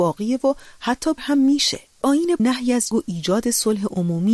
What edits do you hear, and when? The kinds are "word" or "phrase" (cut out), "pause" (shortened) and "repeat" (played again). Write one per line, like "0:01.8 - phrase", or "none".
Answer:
0:01.2 - word
0:02.0 - word
0:02.4 - word
0:02.9 - word